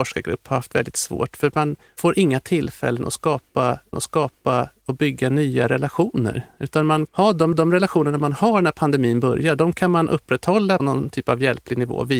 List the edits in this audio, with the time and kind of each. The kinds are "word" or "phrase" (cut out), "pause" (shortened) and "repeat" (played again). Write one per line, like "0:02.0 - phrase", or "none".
0:01.8 - pause
0:03.9 - repeat
0:07.1 - word
0:07.5 - repeat
0:10.8 - word